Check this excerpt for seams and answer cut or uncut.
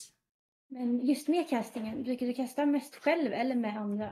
uncut